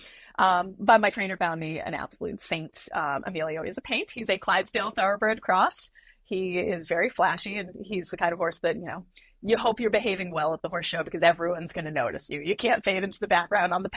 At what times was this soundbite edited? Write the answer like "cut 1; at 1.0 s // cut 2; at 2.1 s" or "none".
none